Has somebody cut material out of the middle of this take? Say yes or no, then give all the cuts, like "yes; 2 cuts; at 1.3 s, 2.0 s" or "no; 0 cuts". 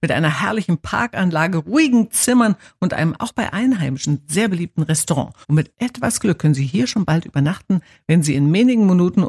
yes; 1 cut; at 5.4 s